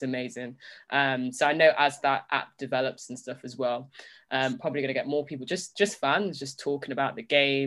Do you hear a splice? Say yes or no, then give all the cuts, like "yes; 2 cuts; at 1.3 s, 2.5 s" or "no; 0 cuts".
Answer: no; 0 cuts